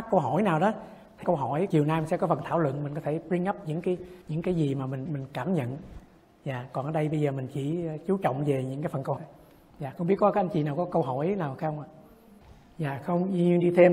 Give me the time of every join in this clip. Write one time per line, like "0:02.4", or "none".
0:01.2
0:01.7
0:04.2
0:05.1
0:09.2
0:12.4